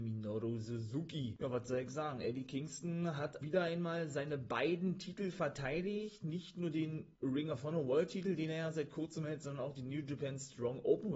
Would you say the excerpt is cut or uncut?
cut